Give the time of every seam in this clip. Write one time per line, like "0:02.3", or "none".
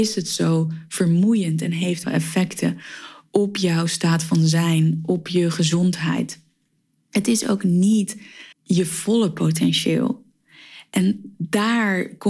0:02.0
0:08.5